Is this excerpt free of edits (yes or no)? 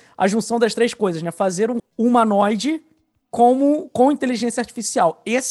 no